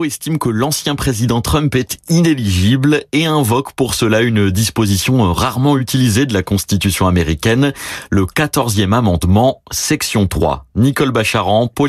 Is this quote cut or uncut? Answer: uncut